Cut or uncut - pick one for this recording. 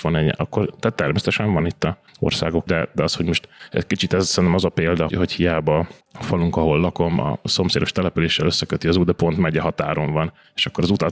cut